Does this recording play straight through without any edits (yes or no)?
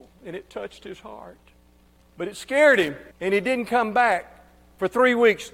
no